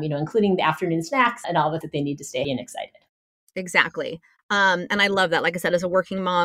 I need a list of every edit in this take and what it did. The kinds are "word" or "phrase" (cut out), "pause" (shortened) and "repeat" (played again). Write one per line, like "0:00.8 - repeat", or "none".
0:01.4 - word
0:01.8 - word
0:02.4 - word